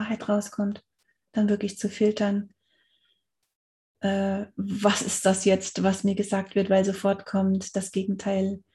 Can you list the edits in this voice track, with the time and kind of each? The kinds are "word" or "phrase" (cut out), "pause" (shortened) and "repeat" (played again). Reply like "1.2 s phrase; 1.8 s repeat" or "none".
none